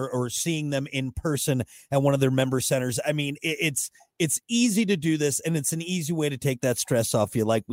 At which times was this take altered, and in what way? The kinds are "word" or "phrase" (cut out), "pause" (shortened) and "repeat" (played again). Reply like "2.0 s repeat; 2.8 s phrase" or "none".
none